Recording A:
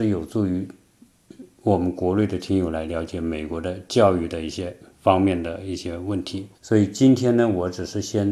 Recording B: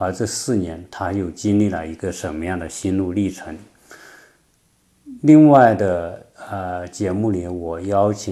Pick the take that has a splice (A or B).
A